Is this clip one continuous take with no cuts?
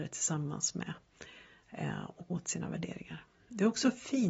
no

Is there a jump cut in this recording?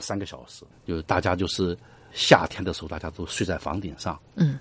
yes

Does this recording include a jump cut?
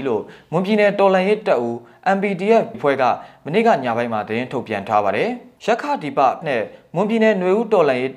yes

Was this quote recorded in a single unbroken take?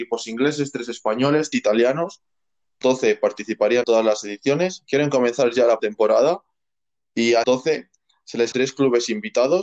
no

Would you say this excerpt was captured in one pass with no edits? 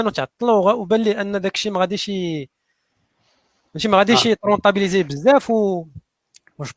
yes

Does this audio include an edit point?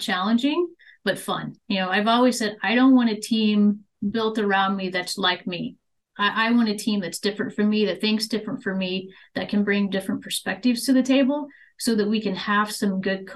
yes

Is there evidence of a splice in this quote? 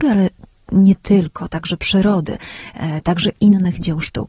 no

